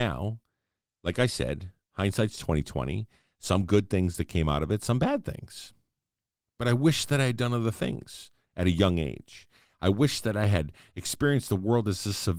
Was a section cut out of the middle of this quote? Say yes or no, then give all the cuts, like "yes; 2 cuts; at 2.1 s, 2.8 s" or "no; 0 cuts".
yes; 1 cut; at 1.8 s